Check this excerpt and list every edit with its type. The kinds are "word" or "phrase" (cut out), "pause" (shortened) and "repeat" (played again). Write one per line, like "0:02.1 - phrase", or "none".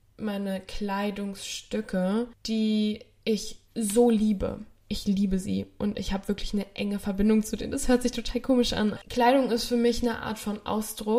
0:03.7 - pause